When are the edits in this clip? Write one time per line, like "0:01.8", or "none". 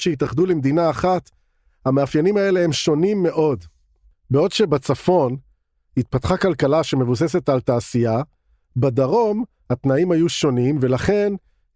none